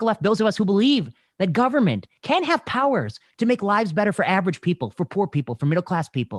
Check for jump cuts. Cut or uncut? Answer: uncut